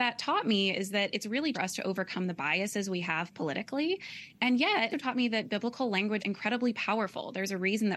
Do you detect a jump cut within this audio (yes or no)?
yes